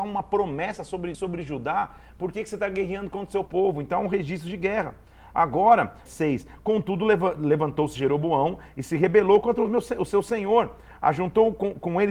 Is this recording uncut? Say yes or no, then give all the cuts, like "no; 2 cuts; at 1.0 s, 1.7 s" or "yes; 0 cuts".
no; 3 cuts; at 1.1 s, 3.5 s, 6.1 s